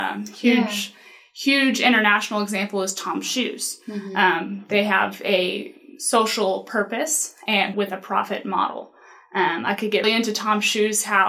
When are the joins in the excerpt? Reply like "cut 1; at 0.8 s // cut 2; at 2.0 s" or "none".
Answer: cut 1; at 7.7 s // cut 2; at 10.0 s